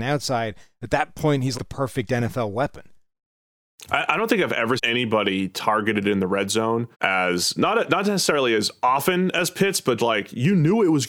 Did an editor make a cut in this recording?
yes; 4 cuts; at 1.5 s, 4.8 s, 6.9 s, 10.0 s

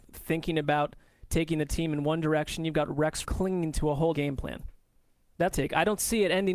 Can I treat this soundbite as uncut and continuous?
no; 3 cuts; at 3.2 s, 4.1 s, 5.5 s

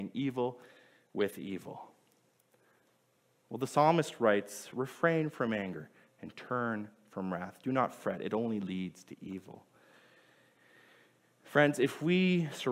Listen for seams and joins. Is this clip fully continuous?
yes; 0 cuts

